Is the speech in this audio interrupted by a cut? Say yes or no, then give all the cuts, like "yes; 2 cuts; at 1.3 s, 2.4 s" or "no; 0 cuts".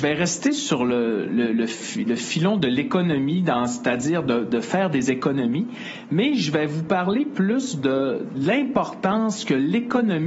no; 0 cuts